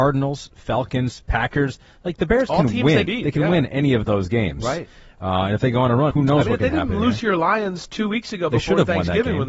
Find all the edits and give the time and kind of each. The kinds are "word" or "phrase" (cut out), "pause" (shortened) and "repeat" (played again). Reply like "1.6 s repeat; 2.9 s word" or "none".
3.1 s word; 6.1 s word